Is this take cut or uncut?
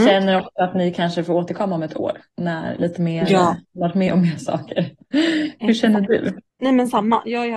cut